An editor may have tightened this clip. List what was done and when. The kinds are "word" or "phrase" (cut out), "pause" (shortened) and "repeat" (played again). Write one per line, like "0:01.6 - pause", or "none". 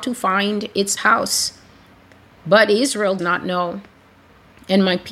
0:01.0 - word
0:03.2 - word